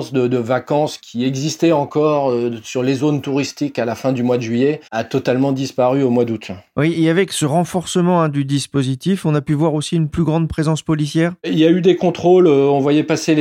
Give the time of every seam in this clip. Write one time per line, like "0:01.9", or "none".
0:04.9